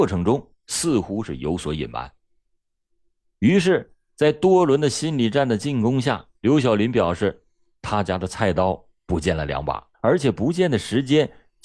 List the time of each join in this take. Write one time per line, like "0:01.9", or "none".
0:06.3
0:09.9